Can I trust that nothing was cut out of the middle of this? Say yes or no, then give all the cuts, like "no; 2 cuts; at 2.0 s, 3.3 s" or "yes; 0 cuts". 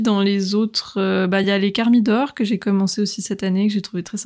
yes; 0 cuts